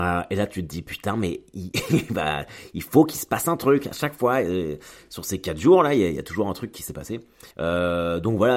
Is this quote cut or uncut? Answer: cut